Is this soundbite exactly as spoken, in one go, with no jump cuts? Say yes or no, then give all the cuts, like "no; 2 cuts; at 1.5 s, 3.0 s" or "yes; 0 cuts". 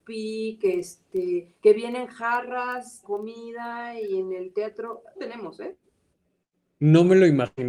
no; 3 cuts; at 1.6 s, 3.0 s, 5.2 s